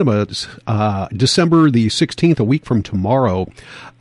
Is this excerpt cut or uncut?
uncut